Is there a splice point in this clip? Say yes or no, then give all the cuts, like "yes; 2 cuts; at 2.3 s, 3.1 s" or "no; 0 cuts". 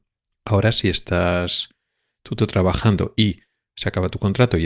no; 0 cuts